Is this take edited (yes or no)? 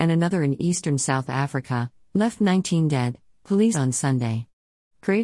yes